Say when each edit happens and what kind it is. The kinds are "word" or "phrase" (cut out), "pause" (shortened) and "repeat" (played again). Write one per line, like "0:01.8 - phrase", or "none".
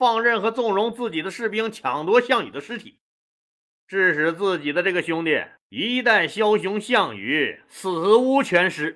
none